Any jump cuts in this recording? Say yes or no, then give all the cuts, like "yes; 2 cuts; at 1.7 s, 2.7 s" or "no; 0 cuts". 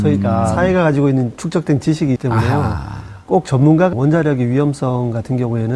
yes; 3 cuts; at 1.4 s, 2.2 s, 3.9 s